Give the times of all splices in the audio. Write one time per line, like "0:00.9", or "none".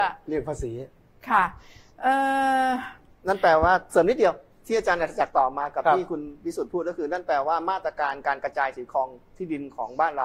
none